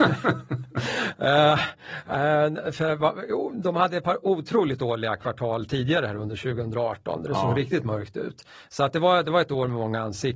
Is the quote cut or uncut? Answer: uncut